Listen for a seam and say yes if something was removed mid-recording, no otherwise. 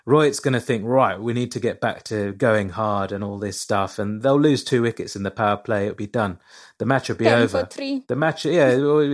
no